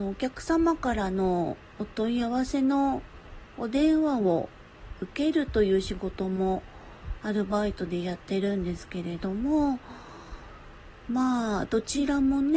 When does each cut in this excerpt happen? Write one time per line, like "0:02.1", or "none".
0:01.7

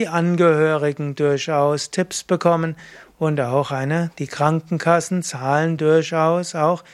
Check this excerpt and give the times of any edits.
none

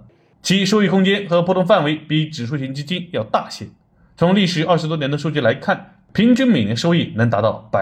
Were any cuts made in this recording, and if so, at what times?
none

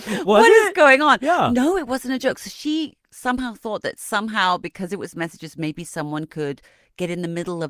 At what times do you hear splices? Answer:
none

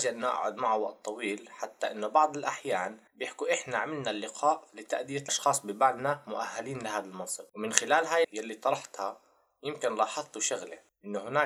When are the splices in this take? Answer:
0:03.1
0:04.7
0:05.3
0:08.2

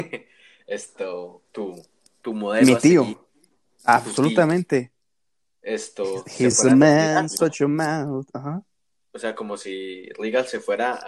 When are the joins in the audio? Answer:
0:01.5

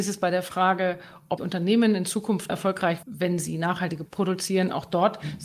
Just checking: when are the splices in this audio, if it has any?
0:01.4
0:02.5
0:03.0
0:04.1

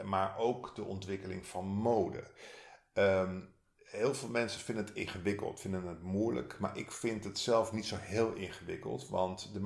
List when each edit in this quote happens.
none

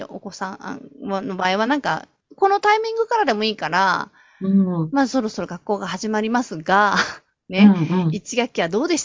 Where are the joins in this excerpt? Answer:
none

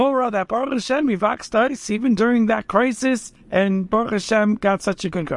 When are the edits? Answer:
0:03.4

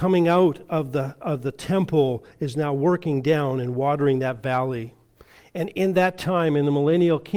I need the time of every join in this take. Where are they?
none

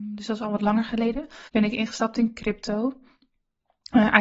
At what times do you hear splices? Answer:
0:01.5

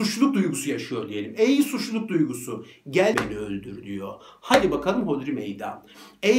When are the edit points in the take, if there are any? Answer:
0:03.1

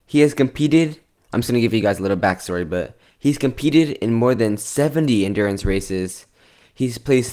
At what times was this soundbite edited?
none

